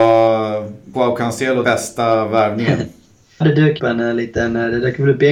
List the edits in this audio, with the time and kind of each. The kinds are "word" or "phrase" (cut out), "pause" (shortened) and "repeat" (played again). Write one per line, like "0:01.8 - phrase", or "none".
0:00.9 - word
0:01.6 - word
0:03.4 - word
0:03.8 - word

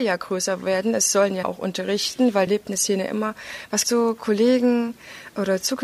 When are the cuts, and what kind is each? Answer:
0:01.4 - word
0:02.5 - word
0:03.8 - word

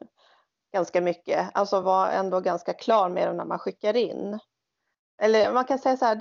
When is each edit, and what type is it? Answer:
none

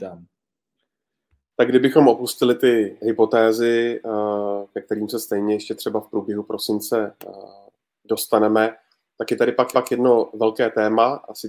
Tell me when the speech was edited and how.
0:03.0 - word
0:09.7 - repeat

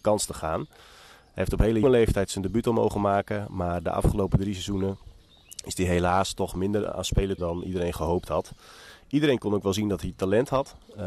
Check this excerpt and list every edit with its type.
0:01.8 - word
0:07.4 - word

